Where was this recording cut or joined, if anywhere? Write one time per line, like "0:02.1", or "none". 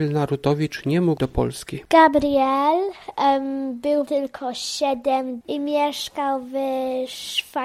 0:01.2
0:01.9
0:04.1
0:05.4

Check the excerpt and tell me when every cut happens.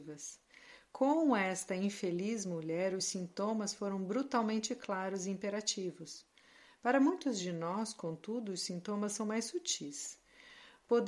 none

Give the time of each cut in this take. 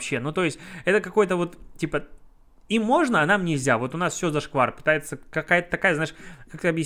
none

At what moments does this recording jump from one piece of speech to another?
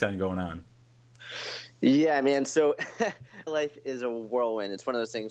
0:03.5

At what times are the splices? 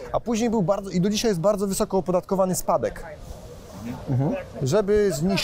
none

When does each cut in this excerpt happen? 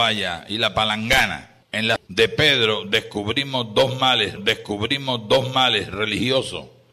0:01.6
0:02.0
0:04.4

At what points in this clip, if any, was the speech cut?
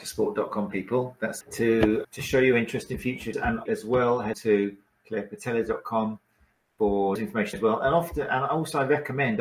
0:01.4
0:02.0
0:03.3
0:03.7
0:04.3
0:07.2
0:07.5

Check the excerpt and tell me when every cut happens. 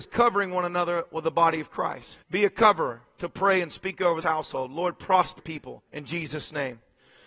0:02.2
0:04.2
0:05.4
0:05.9

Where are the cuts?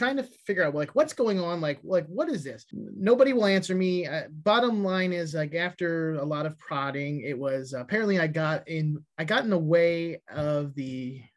none

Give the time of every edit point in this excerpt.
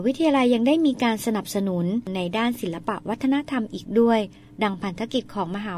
none

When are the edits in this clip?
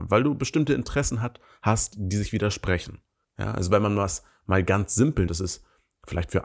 0:03.2
0:05.3

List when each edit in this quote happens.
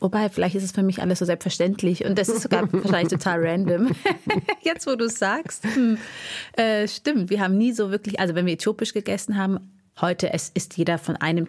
none

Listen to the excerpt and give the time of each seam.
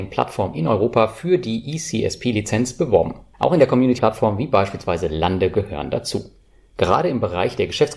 0:04.0

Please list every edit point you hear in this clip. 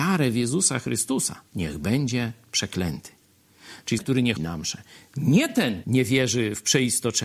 0:01.5
0:04.0
0:04.4
0:05.8

